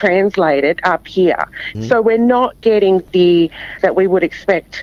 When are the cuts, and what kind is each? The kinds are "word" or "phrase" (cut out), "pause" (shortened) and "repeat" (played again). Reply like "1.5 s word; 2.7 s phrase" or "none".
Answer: 3.8 s word